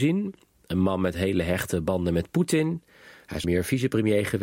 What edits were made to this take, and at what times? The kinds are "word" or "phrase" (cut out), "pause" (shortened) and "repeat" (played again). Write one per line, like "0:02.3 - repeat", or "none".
0:03.4 - word